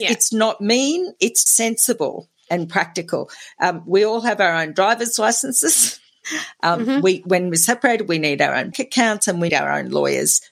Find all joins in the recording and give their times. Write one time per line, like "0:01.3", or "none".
0:01.5
0:08.7
0:09.5